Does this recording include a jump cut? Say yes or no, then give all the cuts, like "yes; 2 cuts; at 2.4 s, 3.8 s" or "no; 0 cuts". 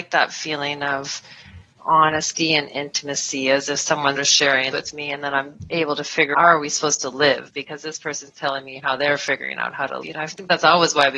yes; 5 cuts; at 1.8 s, 4.1 s, 4.7 s, 6.3 s, 10.0 s